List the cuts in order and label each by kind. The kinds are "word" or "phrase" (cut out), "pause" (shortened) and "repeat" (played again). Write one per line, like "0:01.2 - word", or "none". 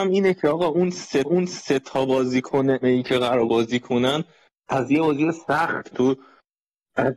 0:01.2 - repeat
0:02.8 - word
0:03.5 - word
0:05.9 - word